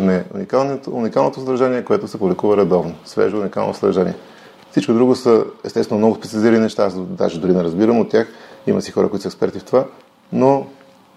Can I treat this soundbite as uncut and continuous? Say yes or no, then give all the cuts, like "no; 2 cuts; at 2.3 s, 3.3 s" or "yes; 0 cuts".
yes; 0 cuts